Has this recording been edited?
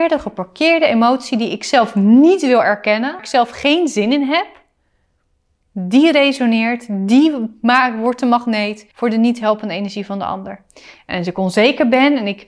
yes; 2 cuts; at 3.2 s, 8.9 s

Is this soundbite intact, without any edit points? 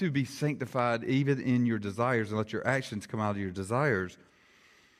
yes; 0 cuts

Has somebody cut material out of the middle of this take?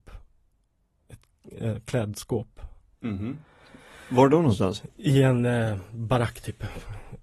no; 0 cuts

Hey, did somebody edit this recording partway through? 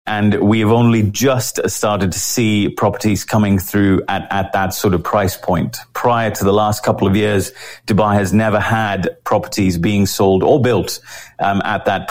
no; 0 cuts

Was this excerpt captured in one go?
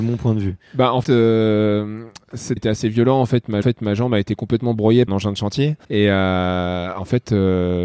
no; 5 cuts; at 1.0 s, 2.6 s, 3.6 s, 5.1 s, 5.8 s

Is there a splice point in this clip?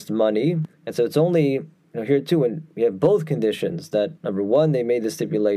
yes; 1 cut; at 4.2 s

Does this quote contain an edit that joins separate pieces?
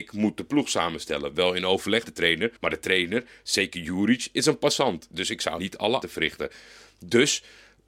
yes; 4 cuts; at 2.0 s, 2.6 s, 5.6 s, 6.0 s

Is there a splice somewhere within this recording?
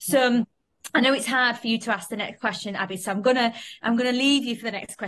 no; 0 cuts

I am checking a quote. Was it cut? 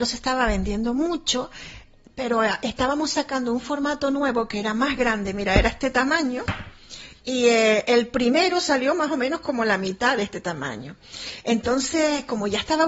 no; 0 cuts

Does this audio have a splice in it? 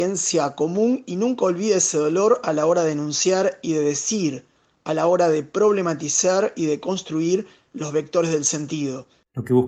no; 0 cuts

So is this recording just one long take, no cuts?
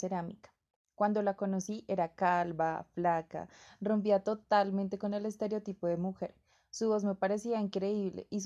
yes; 0 cuts

